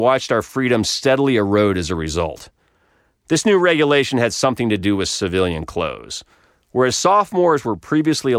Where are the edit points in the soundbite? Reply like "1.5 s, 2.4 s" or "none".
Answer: none